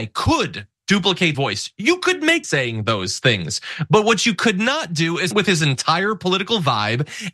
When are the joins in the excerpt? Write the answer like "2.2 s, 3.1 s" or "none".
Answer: 1.3 s, 2.4 s, 5.3 s